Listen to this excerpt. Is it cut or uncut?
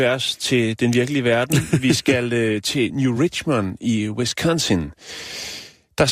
uncut